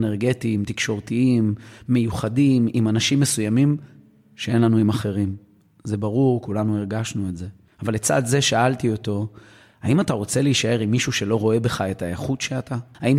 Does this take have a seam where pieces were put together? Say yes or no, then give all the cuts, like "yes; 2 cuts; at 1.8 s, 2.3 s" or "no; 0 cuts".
no; 0 cuts